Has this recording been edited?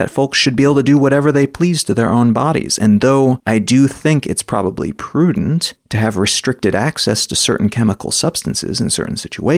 no; 0 cuts

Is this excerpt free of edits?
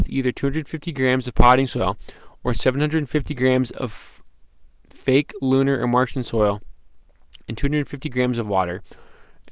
yes; 0 cuts

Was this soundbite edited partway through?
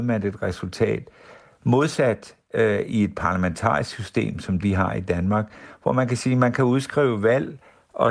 yes; 1 cut; at 4.6 s

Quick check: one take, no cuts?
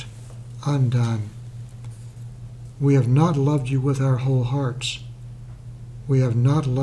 yes; 0 cuts

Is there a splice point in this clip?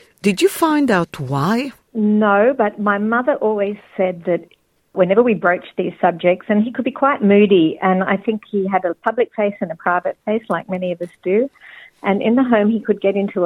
yes; 1 cut; at 1.8 s

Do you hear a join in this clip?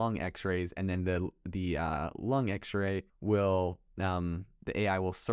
yes; 1 cut; at 3.1 s

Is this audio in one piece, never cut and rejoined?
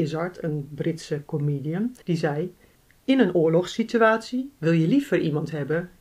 no; 2 cuts; at 2.0 s, 2.8 s

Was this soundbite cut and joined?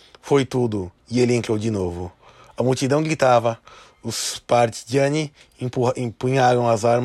yes; 1 cut; at 1.0 s

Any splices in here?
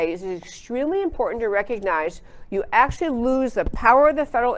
no; 0 cuts

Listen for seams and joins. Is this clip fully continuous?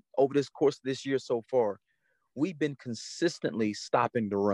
yes; 0 cuts

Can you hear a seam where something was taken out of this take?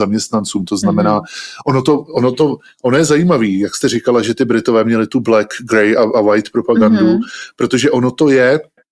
no; 0 cuts

